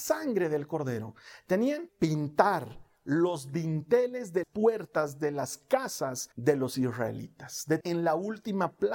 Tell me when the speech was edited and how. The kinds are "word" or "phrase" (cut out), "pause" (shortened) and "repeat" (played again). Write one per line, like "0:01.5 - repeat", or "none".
0:01.9 - word
0:04.4 - word
0:06.3 - pause
0:07.8 - phrase